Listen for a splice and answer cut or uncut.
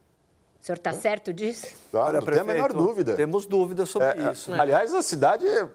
uncut